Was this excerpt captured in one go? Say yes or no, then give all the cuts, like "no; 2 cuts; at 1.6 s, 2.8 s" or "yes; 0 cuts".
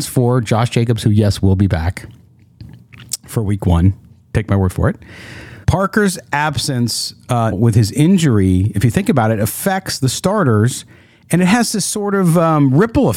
no; 2 cuts; at 5.6 s, 7.5 s